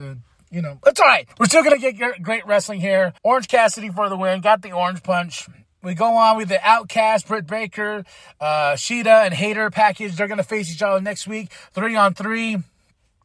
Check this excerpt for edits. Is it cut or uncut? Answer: cut